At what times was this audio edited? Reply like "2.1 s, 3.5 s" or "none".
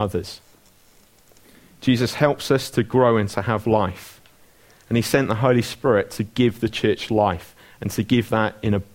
none